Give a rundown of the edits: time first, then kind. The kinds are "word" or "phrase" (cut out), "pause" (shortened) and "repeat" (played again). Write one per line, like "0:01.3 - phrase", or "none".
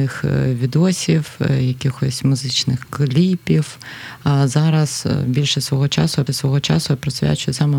0:06.3 - repeat

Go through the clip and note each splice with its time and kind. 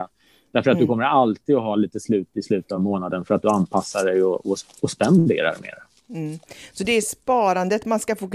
none

